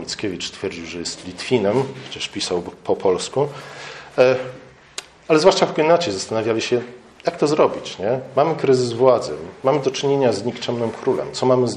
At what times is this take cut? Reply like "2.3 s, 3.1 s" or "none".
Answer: none